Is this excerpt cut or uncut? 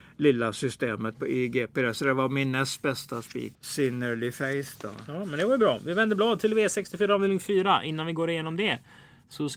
cut